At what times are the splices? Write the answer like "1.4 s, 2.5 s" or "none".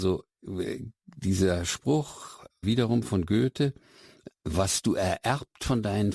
1.0 s, 2.6 s, 4.3 s

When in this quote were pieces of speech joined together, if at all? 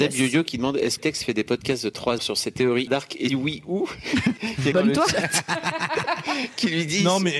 1.0 s, 2.2 s, 2.9 s, 3.3 s, 4.4 s, 4.7 s

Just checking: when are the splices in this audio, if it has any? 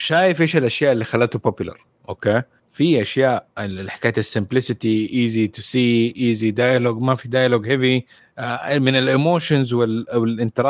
none

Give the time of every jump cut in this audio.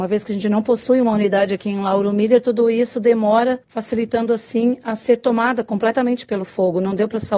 3.6 s

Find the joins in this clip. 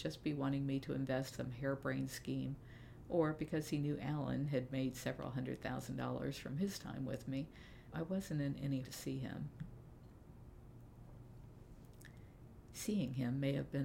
1.3 s, 7.9 s, 8.8 s

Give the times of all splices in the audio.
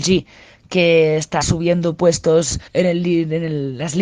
1.4 s, 2.7 s

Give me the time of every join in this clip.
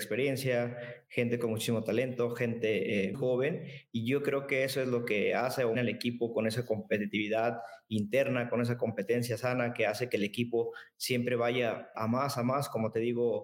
3.1 s, 5.7 s, 11.9 s

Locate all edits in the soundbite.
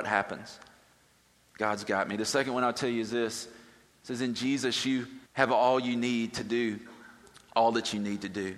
5.2 s

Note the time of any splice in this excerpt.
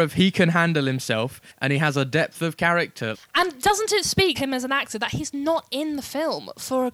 1.5 s, 3.1 s, 4.4 s

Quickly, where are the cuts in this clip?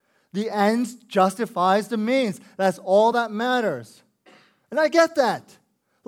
none

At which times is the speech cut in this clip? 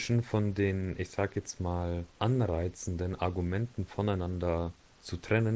2.1 s

